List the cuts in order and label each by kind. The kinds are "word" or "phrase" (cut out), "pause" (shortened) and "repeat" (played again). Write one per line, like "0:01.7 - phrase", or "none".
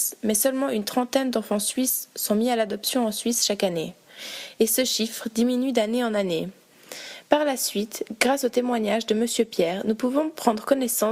none